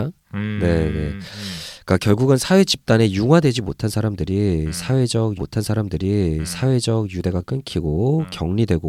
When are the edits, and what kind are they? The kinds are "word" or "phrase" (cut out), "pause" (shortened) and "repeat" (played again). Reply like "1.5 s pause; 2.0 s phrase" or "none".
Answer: 5.4 s repeat